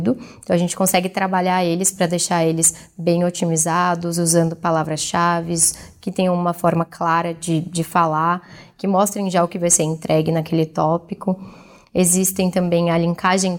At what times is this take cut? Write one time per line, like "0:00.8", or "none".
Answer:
none